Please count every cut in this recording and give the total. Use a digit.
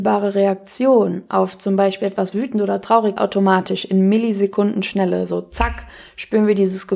2